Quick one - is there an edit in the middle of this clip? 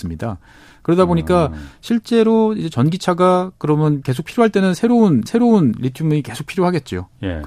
yes; 1 cut; at 5.3 s

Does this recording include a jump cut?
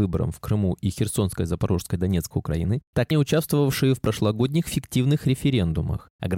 yes; 2 cuts; at 2.3 s, 3.1 s

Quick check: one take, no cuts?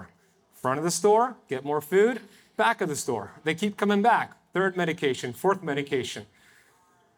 yes; 0 cuts

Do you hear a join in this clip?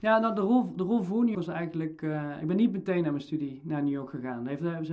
yes; 1 cut; at 1.3 s

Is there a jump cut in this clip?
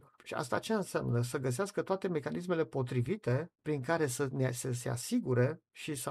yes; 1 cut; at 3.6 s

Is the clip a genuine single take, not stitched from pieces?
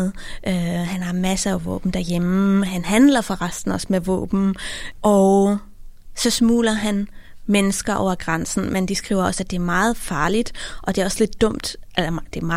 yes; 0 cuts

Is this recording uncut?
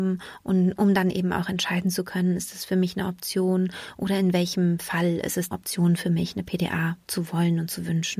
no; 1 cut; at 5.5 s

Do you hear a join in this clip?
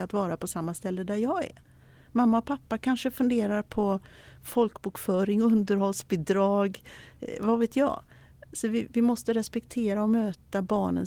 no; 0 cuts

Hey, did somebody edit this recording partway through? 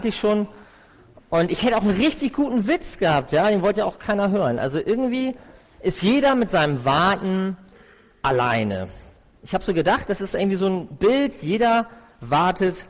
no; 0 cuts

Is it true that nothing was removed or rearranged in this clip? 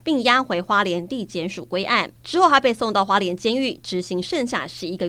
no; 1 cut; at 2.2 s

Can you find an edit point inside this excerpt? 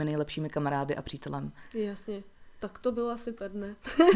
no; 0 cuts

